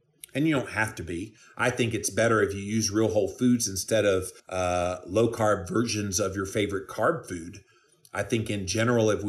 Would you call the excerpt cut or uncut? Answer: cut